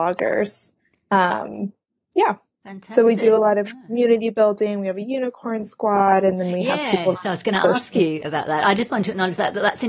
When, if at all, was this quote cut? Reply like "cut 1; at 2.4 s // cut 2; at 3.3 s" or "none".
none